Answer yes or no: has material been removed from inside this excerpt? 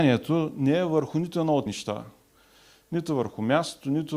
yes